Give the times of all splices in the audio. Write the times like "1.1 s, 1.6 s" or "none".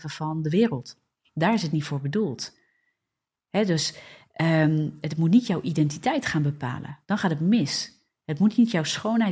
7.0 s